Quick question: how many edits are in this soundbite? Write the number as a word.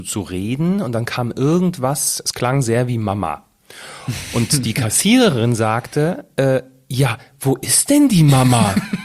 zero